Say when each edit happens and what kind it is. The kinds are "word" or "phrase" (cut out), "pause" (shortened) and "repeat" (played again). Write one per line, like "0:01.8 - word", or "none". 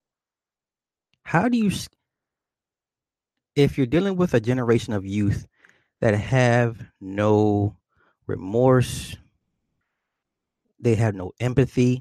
none